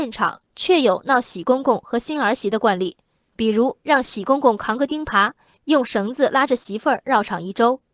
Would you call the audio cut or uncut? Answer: uncut